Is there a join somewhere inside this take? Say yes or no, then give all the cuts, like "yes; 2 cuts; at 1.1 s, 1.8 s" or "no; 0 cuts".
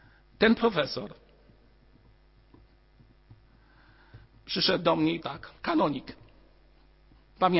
yes; 2 cuts; at 5.2 s, 5.6 s